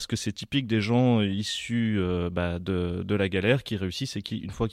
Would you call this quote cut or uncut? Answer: uncut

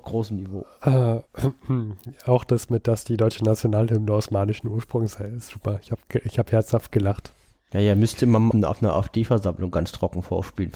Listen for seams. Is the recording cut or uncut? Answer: cut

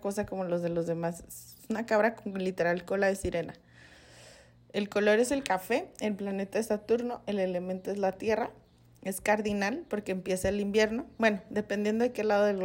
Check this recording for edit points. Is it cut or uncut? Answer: uncut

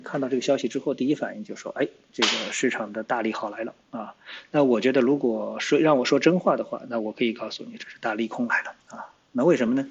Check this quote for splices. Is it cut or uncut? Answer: cut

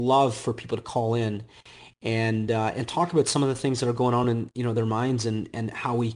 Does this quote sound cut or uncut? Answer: uncut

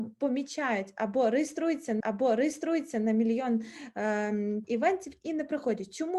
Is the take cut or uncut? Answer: cut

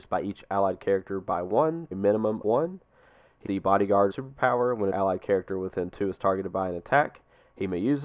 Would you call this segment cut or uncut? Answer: cut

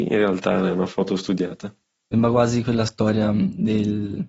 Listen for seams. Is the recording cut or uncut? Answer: uncut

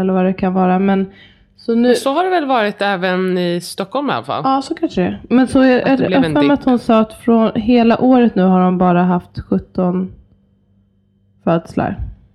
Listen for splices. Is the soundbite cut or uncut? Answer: uncut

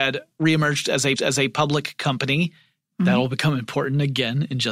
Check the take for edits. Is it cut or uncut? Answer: cut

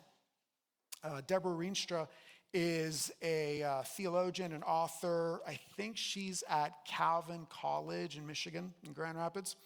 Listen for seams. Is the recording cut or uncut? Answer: uncut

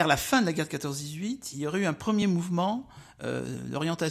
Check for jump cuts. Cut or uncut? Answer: uncut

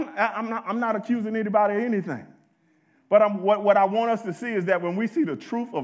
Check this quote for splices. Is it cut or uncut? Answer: uncut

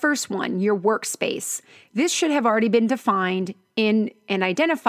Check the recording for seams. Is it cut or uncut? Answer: uncut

